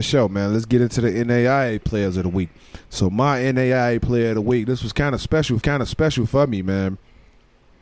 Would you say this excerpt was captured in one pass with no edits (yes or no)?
no